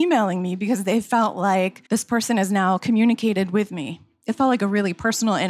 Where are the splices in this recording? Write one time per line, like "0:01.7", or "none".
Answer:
0:01.9